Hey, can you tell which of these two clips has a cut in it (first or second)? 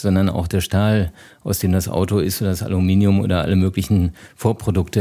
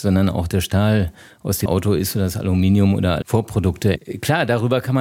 second